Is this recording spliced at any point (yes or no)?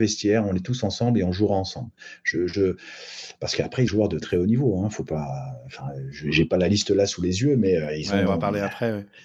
yes